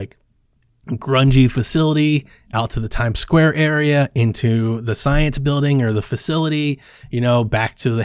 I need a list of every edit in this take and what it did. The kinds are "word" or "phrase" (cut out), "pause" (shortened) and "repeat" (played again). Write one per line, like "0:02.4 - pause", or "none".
none

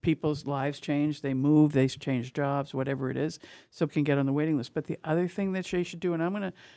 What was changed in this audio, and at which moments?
0:03.9 - word

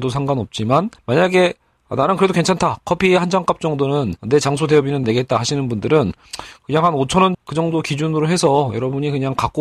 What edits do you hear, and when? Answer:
0:01.0 - pause
0:04.2 - pause
0:05.0 - word
0:07.3 - word

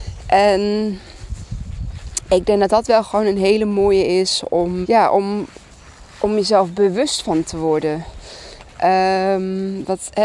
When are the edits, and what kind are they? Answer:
0:04.8 - word

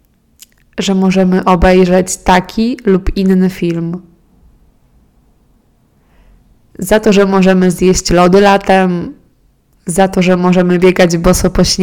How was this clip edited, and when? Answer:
none

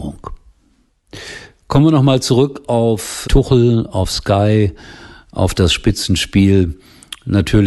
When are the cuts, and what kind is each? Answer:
0:03.2 - word

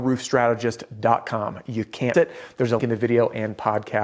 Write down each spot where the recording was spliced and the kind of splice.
0:02.1 - word
0:02.8 - word

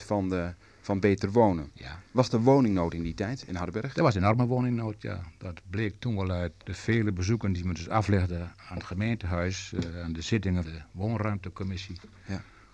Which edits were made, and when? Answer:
0:02.1 - pause
0:06.6 - word
0:10.6 - word

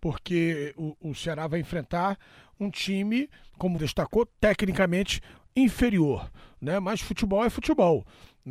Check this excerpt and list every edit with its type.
0:03.8 - word

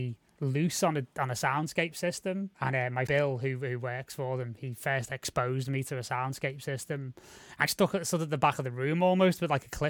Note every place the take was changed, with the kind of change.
0:02.5 - pause
0:03.1 - word
0:07.7 - phrase

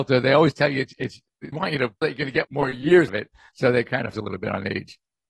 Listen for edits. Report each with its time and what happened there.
0:01.5 - word
0:02.0 - word
0:02.4 - word
0:03.1 - word
0:04.1 - word

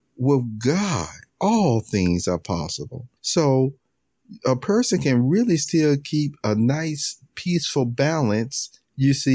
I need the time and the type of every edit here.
0:01.3 - pause
0:03.2 - pause

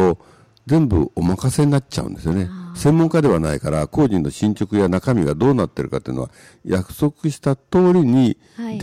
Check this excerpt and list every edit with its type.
none

